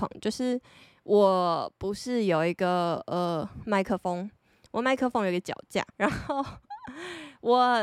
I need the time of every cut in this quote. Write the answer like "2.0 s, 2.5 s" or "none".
5.9 s